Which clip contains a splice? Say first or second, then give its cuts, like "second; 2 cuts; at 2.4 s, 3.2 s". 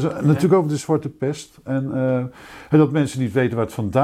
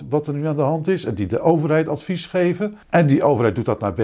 second; 1 cut; at 2.8 s